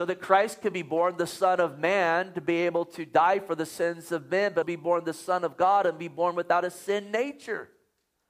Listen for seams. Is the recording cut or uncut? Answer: cut